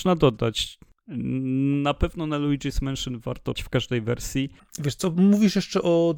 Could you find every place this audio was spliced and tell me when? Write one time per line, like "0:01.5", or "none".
0:03.6